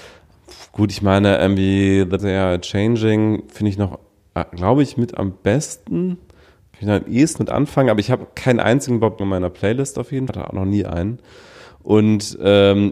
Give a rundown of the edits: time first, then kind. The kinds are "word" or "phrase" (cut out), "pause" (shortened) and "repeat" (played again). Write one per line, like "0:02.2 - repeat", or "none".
0:02.2 - word
0:07.4 - word
0:09.2 - word
0:10.3 - word